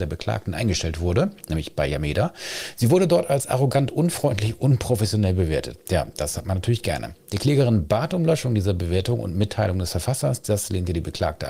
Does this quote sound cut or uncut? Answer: uncut